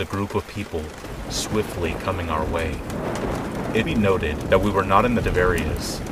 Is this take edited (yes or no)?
yes